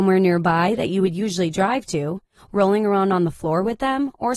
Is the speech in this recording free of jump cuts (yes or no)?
yes